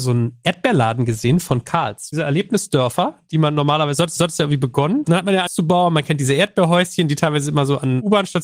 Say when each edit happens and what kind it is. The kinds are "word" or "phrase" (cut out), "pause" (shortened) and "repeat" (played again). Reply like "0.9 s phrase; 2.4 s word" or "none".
4.2 s repeat; 5.5 s phrase